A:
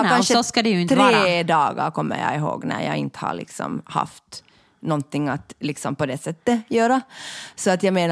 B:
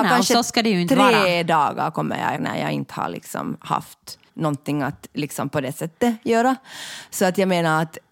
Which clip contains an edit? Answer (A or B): B